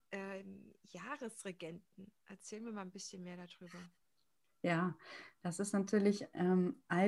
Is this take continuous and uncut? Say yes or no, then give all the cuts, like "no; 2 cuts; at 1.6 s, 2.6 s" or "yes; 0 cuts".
yes; 0 cuts